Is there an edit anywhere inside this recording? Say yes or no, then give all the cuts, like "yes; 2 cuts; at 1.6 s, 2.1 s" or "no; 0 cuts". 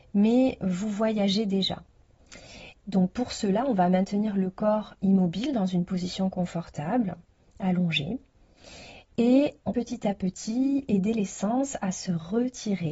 yes; 1 cut; at 9.7 s